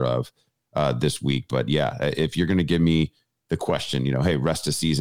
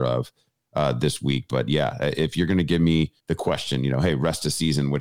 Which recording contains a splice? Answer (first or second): second